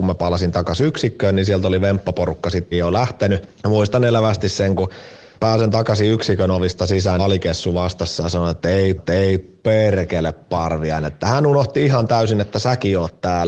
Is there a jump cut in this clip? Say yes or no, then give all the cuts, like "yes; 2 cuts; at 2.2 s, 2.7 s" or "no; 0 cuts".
yes; 5 cuts; at 2.7 s, 3.6 s, 5.4 s, 7.2 s, 9.0 s